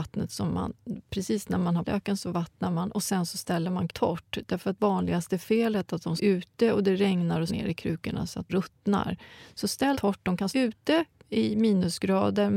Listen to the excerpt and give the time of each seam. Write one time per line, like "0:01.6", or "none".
0:01.8
0:03.9
0:04.8
0:06.2
0:07.5
0:08.5
0:09.9
0:10.5